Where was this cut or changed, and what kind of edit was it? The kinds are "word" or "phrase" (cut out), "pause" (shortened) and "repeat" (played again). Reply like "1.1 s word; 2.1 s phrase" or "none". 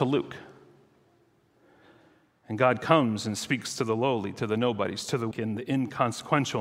5.3 s word